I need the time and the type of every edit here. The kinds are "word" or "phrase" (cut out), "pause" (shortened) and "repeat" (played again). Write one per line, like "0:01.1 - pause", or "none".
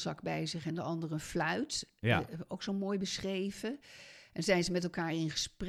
none

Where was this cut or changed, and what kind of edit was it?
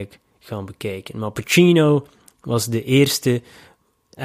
none

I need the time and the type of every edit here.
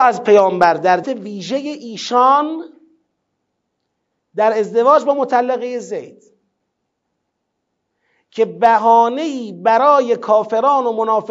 0:01.0 - phrase

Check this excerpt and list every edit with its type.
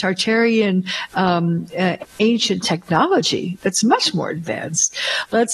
none

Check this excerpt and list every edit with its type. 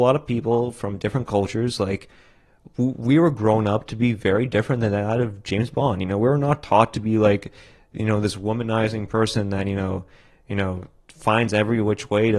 none

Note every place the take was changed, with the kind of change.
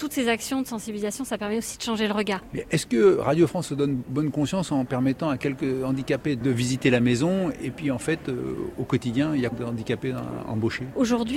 0:09.5 - word

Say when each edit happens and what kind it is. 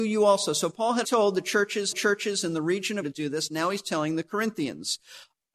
0:01.0 - word
0:01.9 - repeat
0:03.0 - phrase

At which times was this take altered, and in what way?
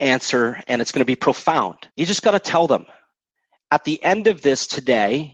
0:01.9 - pause

